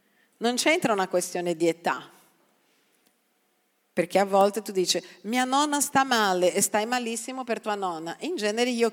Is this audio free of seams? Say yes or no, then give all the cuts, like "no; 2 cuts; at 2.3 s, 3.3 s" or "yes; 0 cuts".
yes; 0 cuts